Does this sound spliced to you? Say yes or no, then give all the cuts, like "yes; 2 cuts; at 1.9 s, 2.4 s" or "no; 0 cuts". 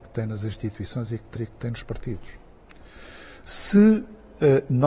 yes; 1 cut; at 1.4 s